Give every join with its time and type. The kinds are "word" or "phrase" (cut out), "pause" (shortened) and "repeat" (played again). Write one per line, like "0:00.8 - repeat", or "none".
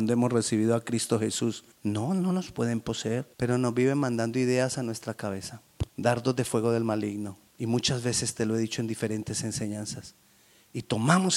0:01.7 - pause
0:03.3 - pause
0:05.9 - pause
0:07.5 - pause